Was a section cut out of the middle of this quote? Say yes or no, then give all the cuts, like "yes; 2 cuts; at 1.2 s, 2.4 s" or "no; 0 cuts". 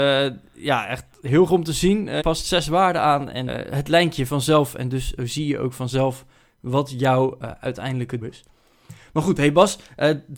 yes; 5 cuts; at 1.5 s, 2.2 s, 3.5 s, 4.3 s, 8.2 s